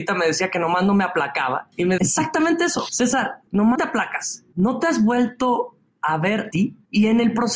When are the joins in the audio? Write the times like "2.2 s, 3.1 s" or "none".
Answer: 2.0 s, 3.7 s, 6.5 s